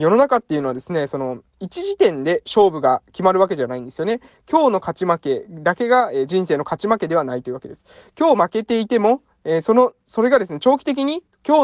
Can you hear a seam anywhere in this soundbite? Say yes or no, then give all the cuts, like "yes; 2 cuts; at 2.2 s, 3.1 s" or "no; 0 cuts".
no; 0 cuts